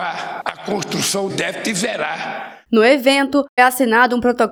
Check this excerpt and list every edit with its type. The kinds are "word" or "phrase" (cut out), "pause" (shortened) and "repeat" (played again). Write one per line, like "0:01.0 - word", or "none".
0:01.3 - word
0:03.6 - word